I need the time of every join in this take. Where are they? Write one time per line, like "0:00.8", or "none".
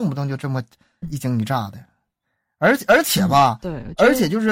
0:01.0